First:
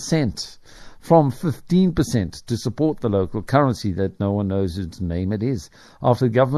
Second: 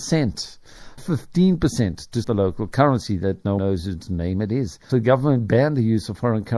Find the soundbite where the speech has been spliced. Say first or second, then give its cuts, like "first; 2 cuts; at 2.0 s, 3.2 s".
second; 4 cuts; at 1.0 s, 2.2 s, 3.6 s, 4.9 s